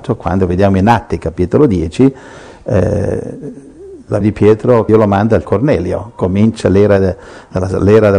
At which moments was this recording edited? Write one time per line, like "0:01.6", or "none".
0:04.2
0:04.9
0:05.4